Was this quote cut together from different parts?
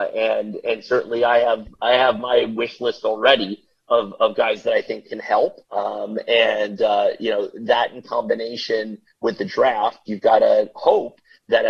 yes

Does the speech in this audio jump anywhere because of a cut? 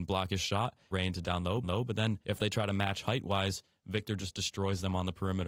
yes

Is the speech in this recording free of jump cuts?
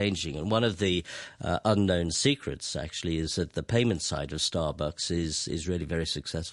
yes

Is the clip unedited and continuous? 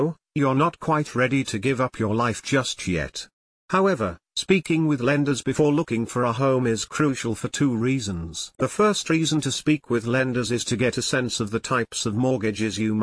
yes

